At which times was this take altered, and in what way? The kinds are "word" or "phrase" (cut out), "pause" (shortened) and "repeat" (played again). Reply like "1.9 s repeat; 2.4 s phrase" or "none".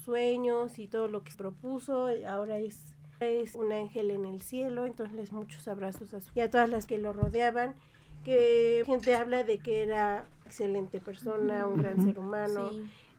1.3 s word; 3.2 s word; 3.5 s word; 5.3 s word; 6.3 s word; 6.9 s word; 8.8 s word; 10.5 s word